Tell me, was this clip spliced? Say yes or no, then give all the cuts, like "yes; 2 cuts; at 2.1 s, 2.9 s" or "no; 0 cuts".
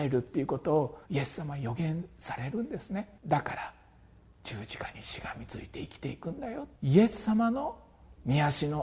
yes; 3 cuts; at 1.0 s, 3.2 s, 6.8 s